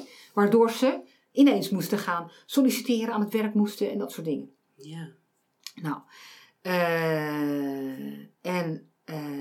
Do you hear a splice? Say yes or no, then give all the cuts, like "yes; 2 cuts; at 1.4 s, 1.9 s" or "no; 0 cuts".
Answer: no; 0 cuts